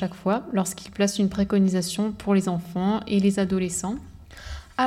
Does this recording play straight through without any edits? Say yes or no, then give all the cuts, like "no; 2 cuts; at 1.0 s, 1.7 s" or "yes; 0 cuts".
yes; 0 cuts